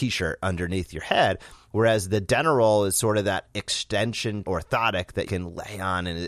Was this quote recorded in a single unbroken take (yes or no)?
no